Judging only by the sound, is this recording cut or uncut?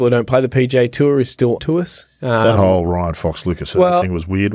cut